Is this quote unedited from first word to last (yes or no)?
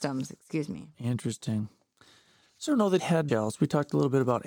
no